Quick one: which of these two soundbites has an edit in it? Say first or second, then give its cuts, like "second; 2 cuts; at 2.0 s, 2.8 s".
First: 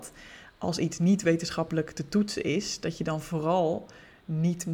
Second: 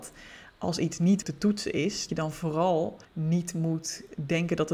second; 3 cuts; at 1.2 s, 2.1 s, 3.0 s